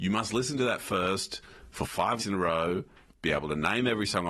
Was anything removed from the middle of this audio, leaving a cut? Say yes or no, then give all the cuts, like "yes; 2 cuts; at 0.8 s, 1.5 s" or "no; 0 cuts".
yes; 1 cut; at 2.2 s